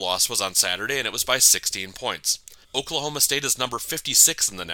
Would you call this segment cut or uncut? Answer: cut